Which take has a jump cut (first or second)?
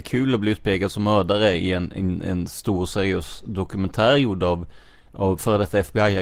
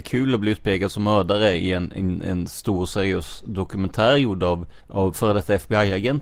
second